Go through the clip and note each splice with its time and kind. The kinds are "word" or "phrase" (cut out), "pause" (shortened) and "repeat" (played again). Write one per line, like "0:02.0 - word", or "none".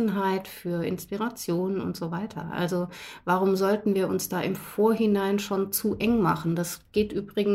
none